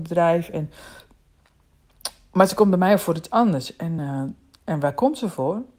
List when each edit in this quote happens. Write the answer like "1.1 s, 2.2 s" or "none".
none